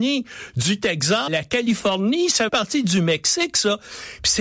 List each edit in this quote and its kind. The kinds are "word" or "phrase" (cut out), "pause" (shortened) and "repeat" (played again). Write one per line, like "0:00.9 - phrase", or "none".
0:01.3 - word
0:02.5 - word